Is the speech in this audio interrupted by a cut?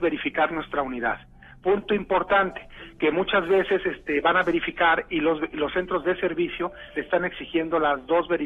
no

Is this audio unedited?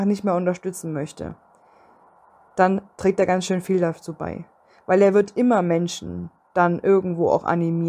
no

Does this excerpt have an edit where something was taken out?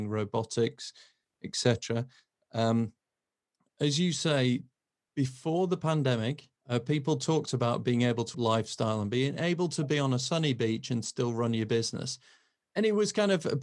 yes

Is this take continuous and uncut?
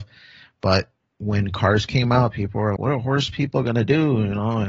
no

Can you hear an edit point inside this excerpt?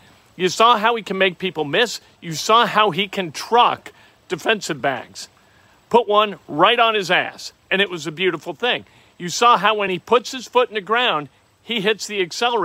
no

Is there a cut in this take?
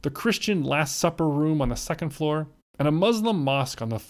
no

